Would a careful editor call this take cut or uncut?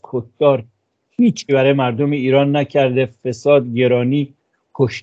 cut